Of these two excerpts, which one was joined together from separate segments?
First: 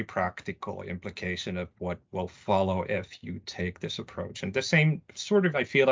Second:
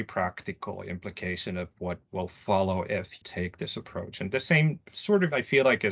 second; 1 cut; at 3.2 s

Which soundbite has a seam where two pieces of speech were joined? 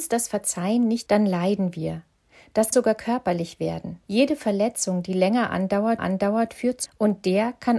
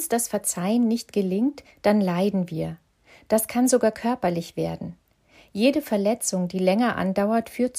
first; 5 cuts; at 1.1 s, 2.7 s, 4.0 s, 6.0 s, 6.9 s

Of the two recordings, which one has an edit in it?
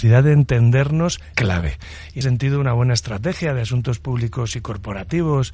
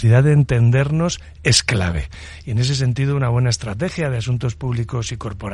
first; 2 cuts; at 1.3 s, 2.2 s

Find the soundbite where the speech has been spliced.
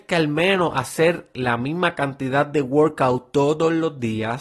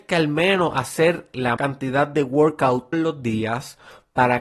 second; 2 cuts; at 1.6 s, 2.9 s

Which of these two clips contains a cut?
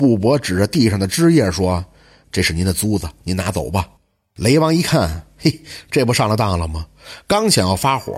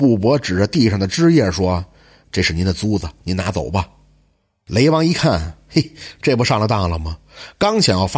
first; 1 cut; at 4.0 s

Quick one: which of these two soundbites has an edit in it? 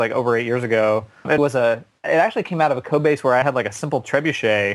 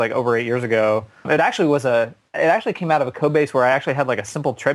first; 2 cuts; at 1.4 s, 3.4 s

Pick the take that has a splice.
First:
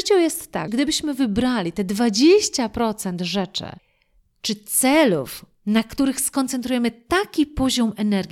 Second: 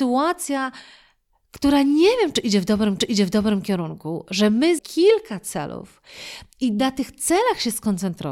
second; 2 cuts; at 3.0 s, 4.8 s

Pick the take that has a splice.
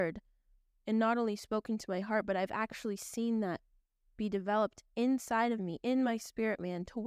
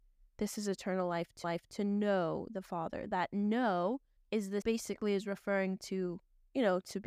second; 3 cuts; at 1.4 s, 4.2 s, 4.6 s

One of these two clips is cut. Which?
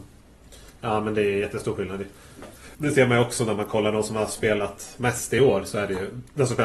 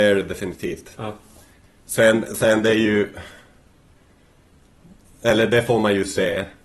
first; 1 cut; at 2.7 s

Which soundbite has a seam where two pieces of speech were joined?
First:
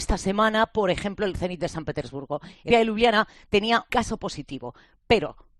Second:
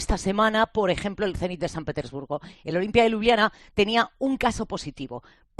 first; 2 cuts; at 2.7 s, 3.9 s

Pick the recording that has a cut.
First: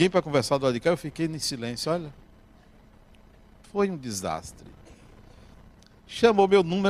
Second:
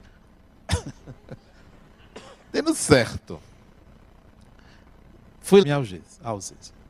second; 2 cuts; at 2.5 s, 5.6 s

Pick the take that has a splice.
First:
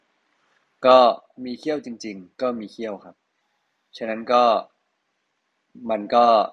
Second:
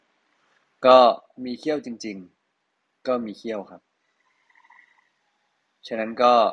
first; 2 cuts; at 2.3 s, 3.4 s

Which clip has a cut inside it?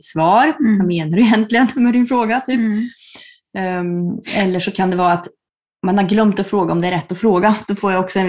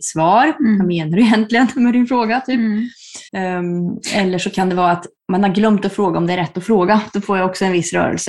second; 2 cuts; at 3.3 s, 5.2 s

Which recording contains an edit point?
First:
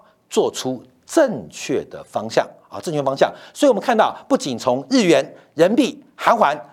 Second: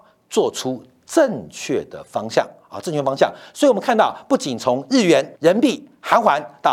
second; 1 cut; at 5.4 s

